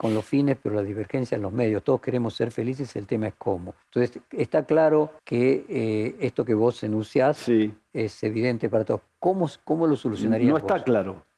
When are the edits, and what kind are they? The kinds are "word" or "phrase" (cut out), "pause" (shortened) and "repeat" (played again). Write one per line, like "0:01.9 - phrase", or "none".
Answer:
0:03.8 - pause
0:05.2 - pause